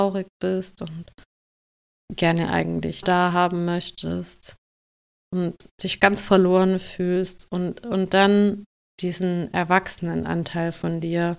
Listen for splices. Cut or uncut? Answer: cut